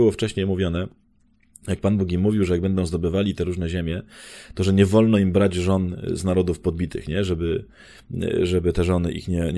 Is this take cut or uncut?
uncut